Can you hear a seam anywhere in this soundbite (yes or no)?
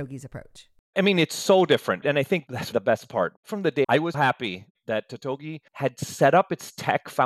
yes